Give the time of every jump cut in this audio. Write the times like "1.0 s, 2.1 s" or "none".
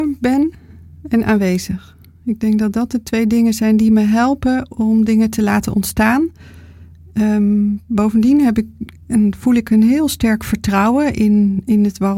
none